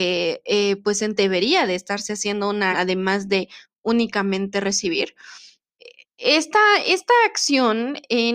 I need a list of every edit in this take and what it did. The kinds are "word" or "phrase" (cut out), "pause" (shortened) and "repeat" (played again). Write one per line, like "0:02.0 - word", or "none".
0:01.2 - word
0:02.7 - word